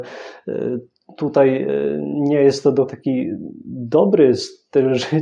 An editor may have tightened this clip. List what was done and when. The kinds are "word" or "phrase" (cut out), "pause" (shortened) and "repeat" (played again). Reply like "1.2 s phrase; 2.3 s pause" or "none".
2.9 s word